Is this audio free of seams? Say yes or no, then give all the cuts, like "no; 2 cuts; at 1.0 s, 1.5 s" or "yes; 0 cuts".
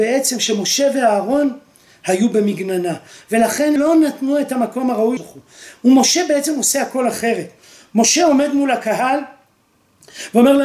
no; 2 cuts; at 3.8 s, 5.2 s